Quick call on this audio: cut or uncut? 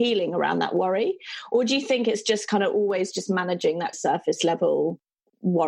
uncut